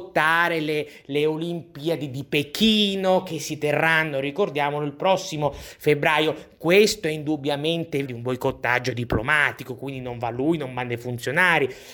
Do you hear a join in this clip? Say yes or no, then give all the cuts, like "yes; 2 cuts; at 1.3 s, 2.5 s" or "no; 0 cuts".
yes; 1 cut; at 8.0 s